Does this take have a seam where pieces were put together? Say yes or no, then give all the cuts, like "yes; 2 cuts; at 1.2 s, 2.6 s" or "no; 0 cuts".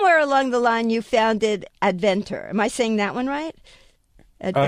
no; 0 cuts